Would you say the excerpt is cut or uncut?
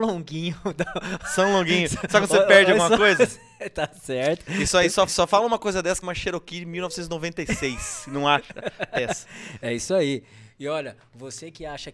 cut